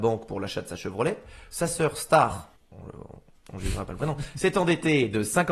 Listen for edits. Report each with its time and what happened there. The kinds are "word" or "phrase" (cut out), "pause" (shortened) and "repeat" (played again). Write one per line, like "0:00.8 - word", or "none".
0:02.6 - pause